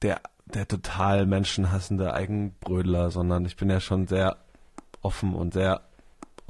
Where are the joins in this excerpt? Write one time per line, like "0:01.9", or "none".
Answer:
0:05.5